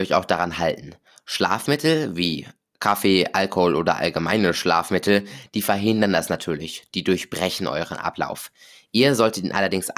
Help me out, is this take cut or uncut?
uncut